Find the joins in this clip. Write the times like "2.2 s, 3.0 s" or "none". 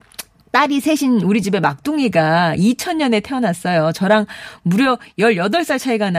none